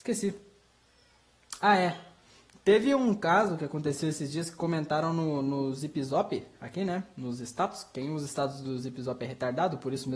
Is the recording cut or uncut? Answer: uncut